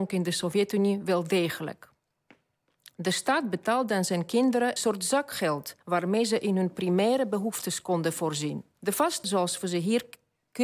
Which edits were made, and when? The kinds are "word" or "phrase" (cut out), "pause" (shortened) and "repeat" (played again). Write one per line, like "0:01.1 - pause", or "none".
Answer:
0:04.8 - word
0:05.8 - pause
0:08.8 - pause
0:09.2 - word